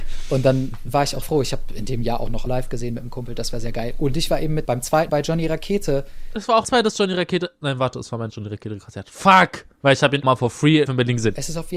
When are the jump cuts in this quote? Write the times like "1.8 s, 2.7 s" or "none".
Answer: 1.2 s, 2.5 s, 4.6 s, 5.1 s, 6.6 s, 8.3 s, 10.2 s, 10.9 s